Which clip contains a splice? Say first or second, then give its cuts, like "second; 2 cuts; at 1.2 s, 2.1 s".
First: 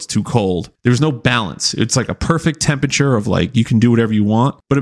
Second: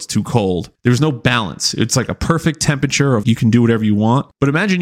second; 1 cut; at 3.2 s